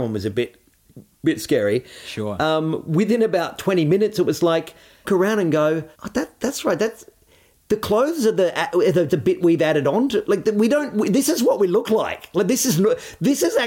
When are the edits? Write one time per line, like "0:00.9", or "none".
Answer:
0:05.0
0:05.9
0:09.1